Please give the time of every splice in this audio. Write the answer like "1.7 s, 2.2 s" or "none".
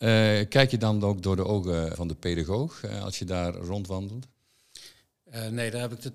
1.9 s